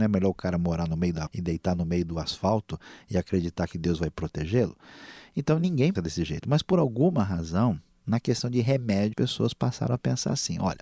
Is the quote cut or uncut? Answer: cut